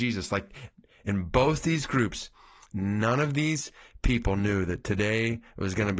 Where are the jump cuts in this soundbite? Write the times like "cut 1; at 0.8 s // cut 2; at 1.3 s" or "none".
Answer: none